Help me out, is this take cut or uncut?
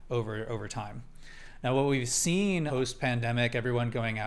uncut